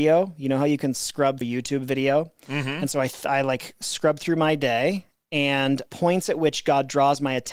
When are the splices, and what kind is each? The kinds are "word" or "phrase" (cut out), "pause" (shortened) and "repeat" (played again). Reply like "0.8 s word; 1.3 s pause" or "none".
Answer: 1.4 s word; 5.9 s word